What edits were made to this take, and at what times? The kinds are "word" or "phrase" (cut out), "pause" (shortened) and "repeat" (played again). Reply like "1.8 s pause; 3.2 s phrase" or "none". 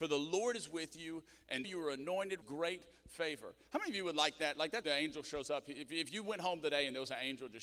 1.6 s word; 2.4 s word; 4.8 s phrase